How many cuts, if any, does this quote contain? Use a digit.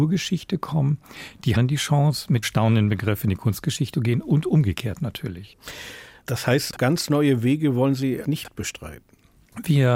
5